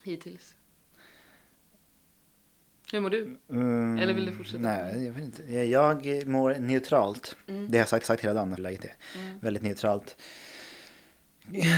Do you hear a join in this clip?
yes; 2 cuts; at 8.0 s, 8.6 s

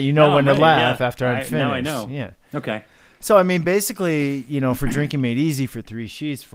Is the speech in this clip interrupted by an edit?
no; 0 cuts

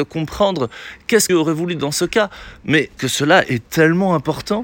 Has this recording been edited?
yes; 2 cuts; at 1.3 s, 3.0 s

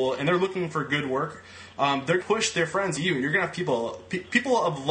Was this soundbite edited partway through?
yes; 3 cuts; at 2.2 s, 3.0 s, 3.5 s

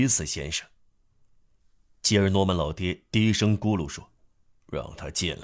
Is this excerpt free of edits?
no; 1 cut; at 4.2 s

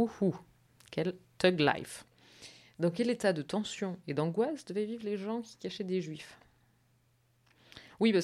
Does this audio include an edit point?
no; 0 cuts

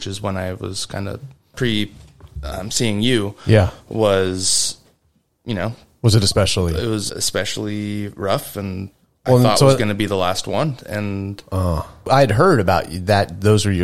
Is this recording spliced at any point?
yes; 1 cut; at 7.1 s

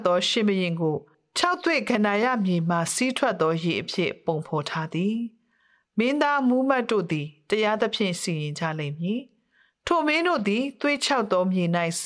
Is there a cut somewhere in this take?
no; 0 cuts

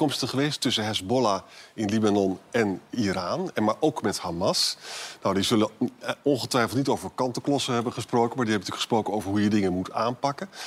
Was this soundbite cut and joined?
no; 0 cuts

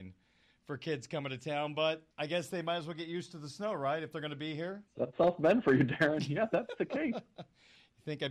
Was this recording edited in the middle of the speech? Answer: yes; 2 cuts; at 2.1 s, 4.9 s

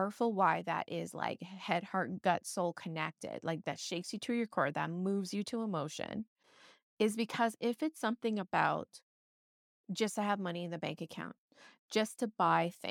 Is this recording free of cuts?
yes; 0 cuts

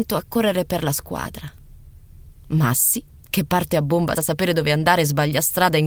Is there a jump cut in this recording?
yes; 1 cut; at 4.1 s

